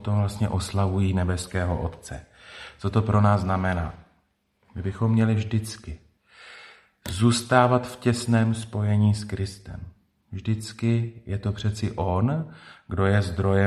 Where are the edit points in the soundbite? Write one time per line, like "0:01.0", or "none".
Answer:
none